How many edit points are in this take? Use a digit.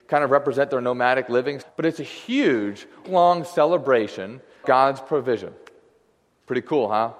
3